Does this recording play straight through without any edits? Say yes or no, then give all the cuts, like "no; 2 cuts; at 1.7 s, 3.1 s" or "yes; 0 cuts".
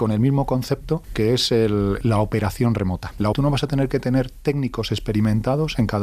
no; 1 cut; at 3.3 s